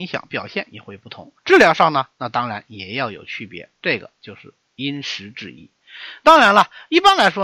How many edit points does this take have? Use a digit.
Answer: 1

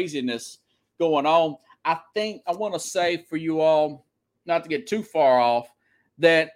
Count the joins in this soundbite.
0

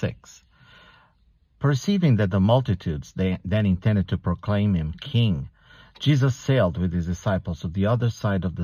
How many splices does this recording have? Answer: 0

